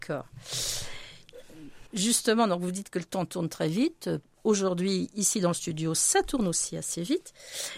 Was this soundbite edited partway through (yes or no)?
yes